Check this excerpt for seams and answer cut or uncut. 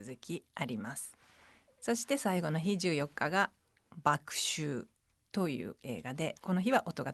uncut